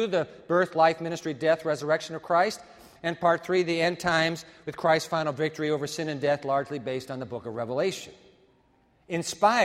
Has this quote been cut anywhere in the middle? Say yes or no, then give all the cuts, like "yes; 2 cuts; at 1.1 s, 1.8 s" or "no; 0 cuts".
no; 0 cuts